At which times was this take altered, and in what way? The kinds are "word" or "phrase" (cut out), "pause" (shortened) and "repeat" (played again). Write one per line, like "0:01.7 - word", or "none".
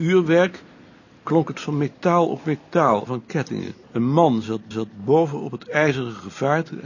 0:01.5 - word
0:03.1 - phrase
0:03.8 - pause
0:04.7 - repeat